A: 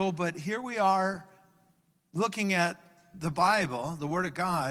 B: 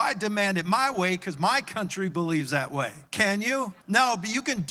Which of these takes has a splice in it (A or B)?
B